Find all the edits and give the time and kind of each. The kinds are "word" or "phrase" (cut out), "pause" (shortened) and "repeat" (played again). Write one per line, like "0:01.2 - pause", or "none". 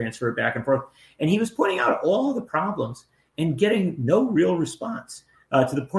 none